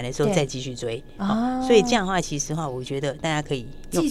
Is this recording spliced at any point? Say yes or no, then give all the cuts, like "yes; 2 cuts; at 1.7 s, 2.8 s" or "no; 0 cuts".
no; 0 cuts